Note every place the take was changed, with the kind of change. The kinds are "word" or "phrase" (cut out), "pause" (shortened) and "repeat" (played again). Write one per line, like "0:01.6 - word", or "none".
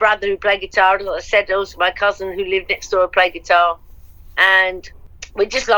none